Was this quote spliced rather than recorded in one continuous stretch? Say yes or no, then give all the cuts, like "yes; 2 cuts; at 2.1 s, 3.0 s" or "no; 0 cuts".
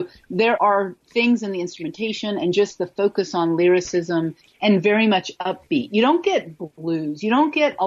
no; 0 cuts